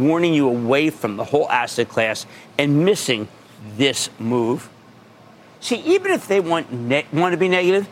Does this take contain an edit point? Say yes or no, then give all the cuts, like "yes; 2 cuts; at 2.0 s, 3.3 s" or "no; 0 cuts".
no; 0 cuts